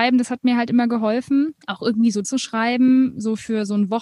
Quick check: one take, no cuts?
no; 2 cuts; at 1.6 s, 2.2 s

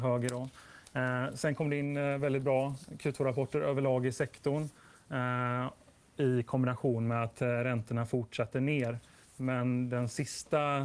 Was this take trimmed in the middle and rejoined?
no; 0 cuts

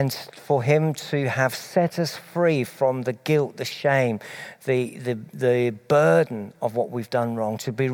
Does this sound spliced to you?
no; 0 cuts

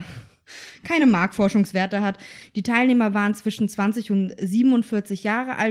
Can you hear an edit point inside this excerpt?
no; 0 cuts

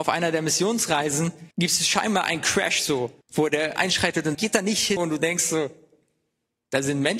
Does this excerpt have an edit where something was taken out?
yes; 5 cuts; at 1.5 s, 3.2 s, 3.8 s, 4.3 s, 5.0 s

